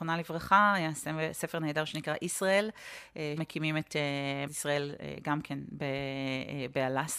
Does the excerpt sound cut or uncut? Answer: cut